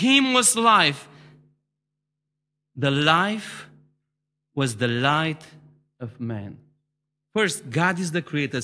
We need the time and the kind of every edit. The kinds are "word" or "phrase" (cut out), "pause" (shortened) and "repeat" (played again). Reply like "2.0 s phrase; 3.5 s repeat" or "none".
none